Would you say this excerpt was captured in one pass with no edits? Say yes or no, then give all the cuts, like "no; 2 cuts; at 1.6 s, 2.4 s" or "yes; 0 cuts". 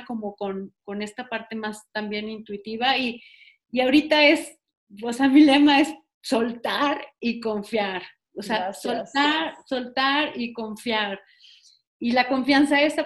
yes; 0 cuts